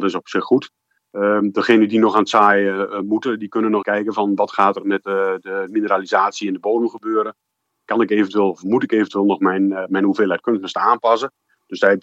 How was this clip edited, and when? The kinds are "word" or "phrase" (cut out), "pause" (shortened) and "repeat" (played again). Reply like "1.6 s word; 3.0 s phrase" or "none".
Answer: 3.8 s word

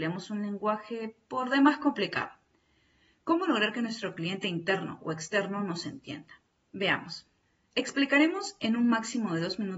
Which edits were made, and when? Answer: none

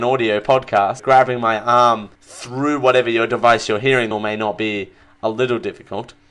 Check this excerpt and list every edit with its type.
1.0 s word; 2.1 s pause; 4.1 s phrase

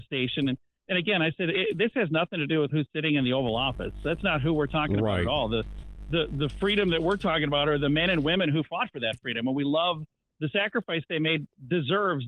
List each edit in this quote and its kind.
none

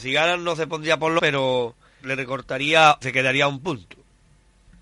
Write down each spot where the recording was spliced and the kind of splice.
1.2 s word; 2.0 s word; 3.0 s word

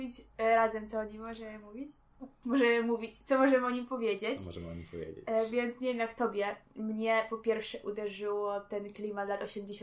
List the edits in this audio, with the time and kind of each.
none

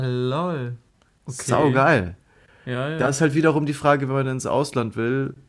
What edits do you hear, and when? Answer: none

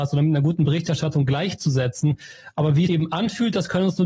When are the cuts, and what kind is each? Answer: 2.9 s phrase

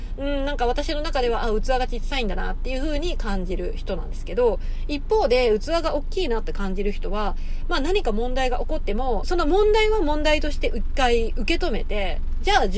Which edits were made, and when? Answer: 9.2 s word

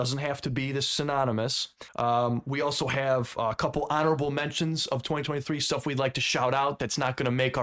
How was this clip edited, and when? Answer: 1.9 s pause

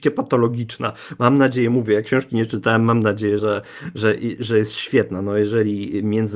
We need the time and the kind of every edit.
3.4 s word

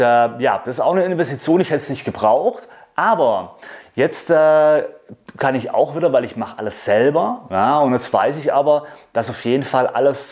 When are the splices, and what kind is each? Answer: none

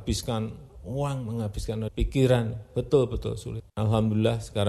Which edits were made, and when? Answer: 1.9 s word

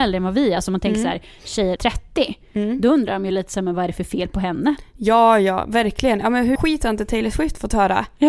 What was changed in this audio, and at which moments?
1.8 s word; 6.6 s word

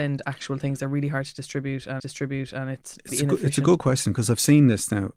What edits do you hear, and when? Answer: 2.0 s repeat; 3.1 s word

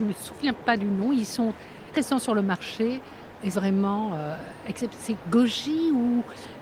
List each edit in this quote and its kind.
1.9 s word; 3.5 s word

